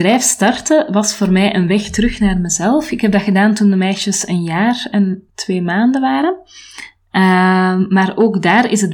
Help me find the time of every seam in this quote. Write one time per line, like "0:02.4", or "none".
0:05.3